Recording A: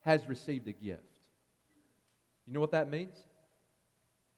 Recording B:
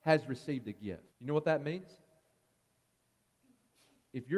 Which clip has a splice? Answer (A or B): B